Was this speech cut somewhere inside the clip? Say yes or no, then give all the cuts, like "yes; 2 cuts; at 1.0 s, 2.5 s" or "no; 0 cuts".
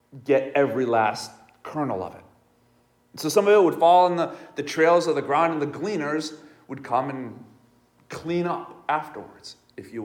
no; 0 cuts